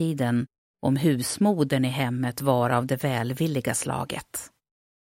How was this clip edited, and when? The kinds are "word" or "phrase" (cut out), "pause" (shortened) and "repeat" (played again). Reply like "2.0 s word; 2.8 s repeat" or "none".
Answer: none